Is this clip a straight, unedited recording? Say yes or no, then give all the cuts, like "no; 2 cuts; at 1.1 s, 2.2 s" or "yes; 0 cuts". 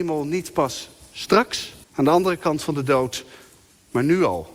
no; 1 cut; at 1.8 s